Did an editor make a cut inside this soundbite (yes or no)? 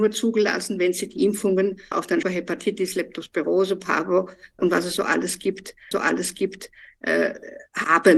yes